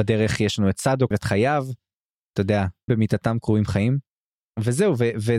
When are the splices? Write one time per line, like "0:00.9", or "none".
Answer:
0:01.1
0:02.9